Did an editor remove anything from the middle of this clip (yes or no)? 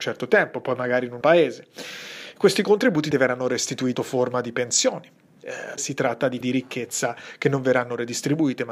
yes